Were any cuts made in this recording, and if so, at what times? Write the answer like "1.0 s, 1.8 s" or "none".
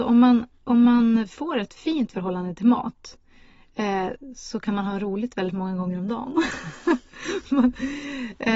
none